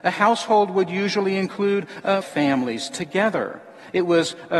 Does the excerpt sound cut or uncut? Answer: cut